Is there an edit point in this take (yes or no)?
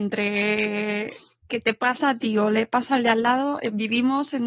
no